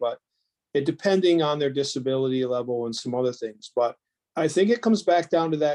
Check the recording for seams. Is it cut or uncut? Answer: cut